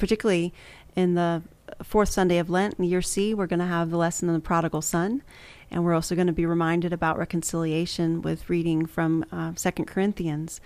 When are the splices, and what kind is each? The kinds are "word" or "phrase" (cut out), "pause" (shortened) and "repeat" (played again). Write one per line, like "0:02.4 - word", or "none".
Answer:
none